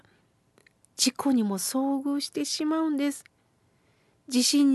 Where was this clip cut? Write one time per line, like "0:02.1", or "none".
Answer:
none